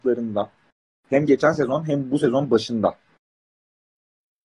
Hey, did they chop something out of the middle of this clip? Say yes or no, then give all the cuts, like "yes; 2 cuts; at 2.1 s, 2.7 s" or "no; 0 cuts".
no; 0 cuts